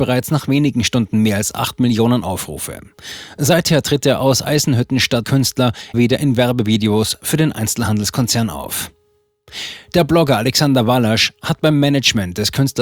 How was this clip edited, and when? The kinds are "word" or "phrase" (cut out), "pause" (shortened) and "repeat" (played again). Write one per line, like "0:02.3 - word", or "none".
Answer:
0:05.2 - word
0:05.9 - word